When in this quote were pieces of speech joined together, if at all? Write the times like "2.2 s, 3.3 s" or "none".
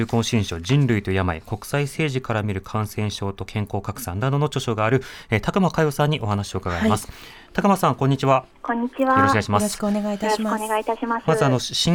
8.5 s